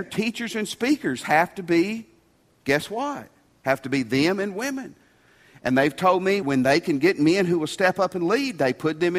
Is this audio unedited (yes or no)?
no